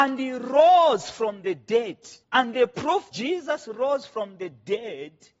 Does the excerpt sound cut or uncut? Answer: cut